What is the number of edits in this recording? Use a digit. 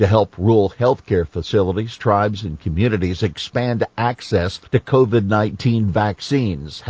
1